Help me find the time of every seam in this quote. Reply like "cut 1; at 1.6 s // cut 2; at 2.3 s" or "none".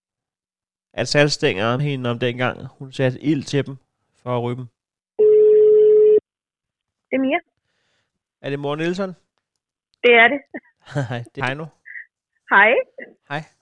cut 1; at 1.8 s // cut 2; at 11.4 s